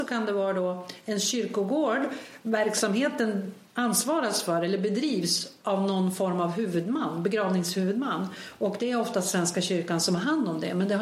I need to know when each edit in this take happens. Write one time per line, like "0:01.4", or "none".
0:03.7